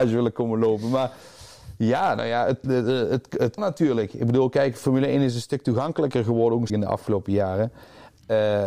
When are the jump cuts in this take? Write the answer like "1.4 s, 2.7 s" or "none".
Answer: 2.6 s, 3.6 s, 6.7 s

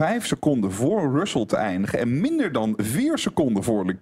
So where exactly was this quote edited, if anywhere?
none

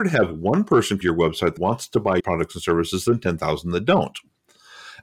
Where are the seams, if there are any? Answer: 1.0 s, 1.6 s, 2.2 s

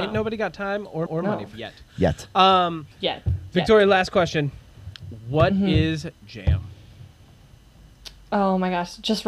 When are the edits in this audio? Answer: 1.1 s, 1.5 s, 2.9 s, 6.1 s

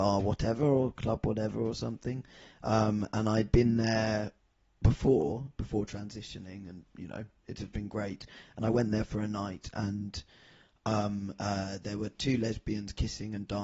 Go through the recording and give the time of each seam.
none

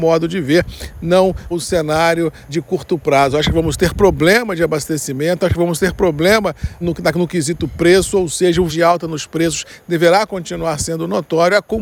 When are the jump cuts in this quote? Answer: 1.5 s, 2.5 s, 6.8 s, 8.7 s

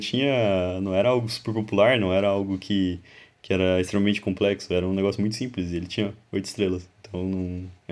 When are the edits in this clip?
none

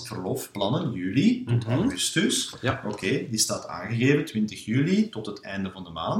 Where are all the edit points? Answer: none

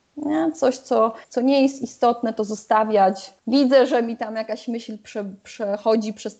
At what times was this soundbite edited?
1.2 s, 3.4 s

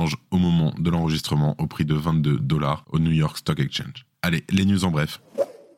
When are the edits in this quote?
none

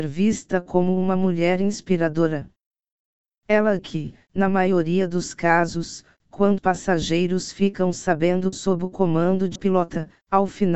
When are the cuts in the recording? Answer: 3.8 s, 6.6 s, 8.5 s, 9.6 s

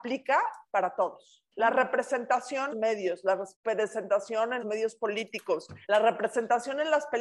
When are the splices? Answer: 1.5 s, 2.7 s, 3.5 s, 4.6 s, 5.8 s

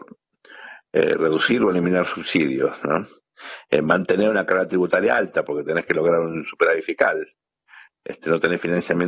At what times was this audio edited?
none

